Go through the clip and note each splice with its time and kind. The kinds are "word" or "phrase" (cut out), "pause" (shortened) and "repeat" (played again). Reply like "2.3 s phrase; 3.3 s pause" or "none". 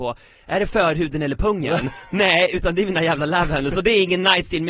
none